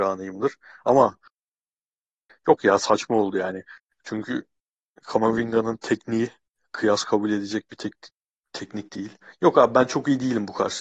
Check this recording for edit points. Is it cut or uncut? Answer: uncut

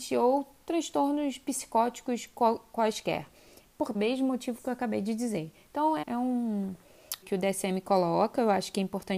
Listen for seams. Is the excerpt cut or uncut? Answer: cut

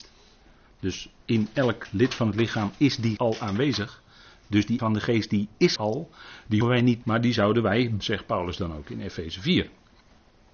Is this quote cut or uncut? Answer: cut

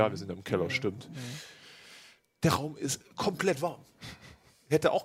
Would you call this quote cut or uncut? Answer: uncut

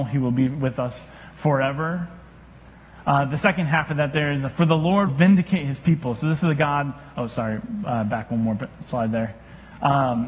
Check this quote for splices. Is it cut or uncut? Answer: cut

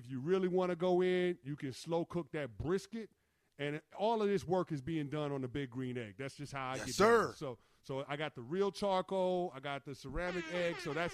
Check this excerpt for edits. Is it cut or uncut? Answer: uncut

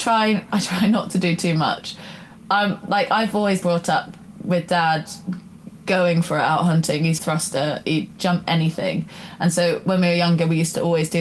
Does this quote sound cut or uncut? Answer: cut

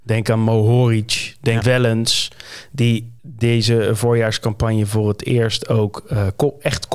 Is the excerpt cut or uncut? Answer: cut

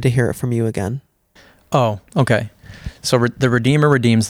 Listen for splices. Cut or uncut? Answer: cut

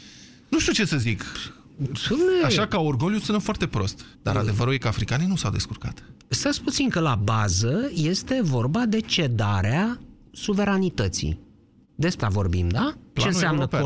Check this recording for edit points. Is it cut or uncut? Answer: cut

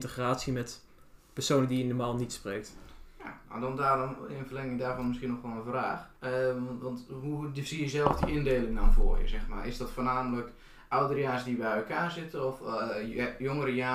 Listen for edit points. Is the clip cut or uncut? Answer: cut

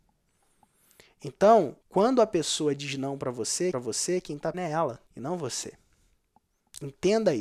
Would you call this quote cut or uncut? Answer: cut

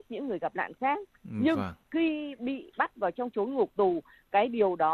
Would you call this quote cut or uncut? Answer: uncut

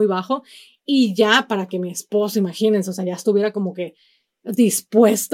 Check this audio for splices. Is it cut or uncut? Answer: uncut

